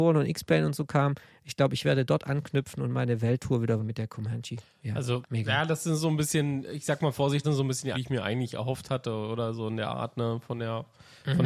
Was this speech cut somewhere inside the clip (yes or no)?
yes